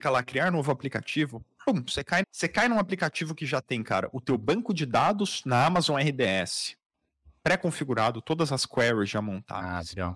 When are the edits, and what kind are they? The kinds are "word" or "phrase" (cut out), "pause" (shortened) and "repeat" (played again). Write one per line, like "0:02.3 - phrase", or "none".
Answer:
0:02.2 - word